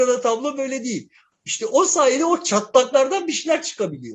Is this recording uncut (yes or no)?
yes